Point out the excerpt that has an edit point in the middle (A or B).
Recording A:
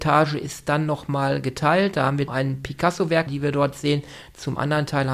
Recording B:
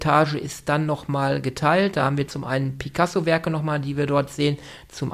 A